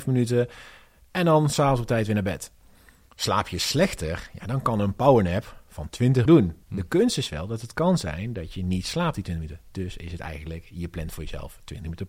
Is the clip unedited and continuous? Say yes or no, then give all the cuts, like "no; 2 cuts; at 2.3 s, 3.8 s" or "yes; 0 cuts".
no; 2 cuts; at 6.3 s, 6.6 s